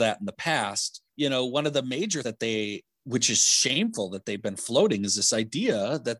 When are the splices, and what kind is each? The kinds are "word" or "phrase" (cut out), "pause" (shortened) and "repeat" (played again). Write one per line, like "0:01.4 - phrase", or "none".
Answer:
0:01.1 - word
0:02.2 - word